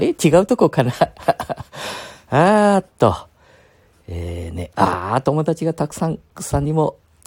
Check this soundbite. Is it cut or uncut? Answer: cut